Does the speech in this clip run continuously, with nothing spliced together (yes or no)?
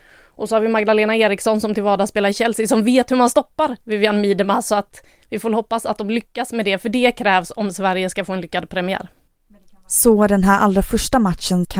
yes